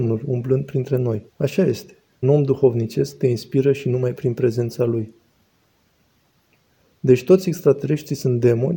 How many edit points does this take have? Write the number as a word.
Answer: two